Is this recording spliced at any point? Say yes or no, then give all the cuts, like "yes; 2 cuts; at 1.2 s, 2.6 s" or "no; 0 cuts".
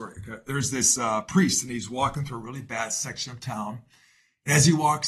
no; 0 cuts